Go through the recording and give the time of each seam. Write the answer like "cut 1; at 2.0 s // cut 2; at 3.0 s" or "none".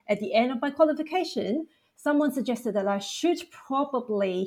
none